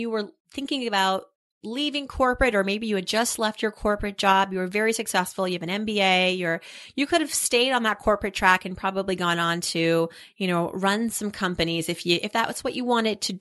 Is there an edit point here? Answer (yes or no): no